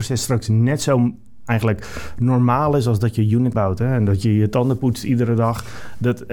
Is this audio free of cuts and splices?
no; 1 cut; at 3.5 s

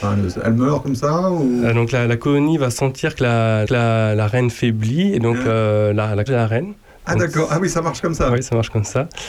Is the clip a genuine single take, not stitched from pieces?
no; 3 cuts; at 3.6 s, 6.3 s, 6.9 s

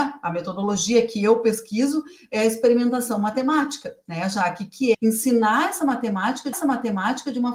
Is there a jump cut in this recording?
yes; 2 cuts; at 4.9 s, 6.5 s

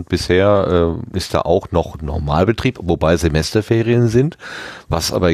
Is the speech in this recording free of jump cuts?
yes; 0 cuts

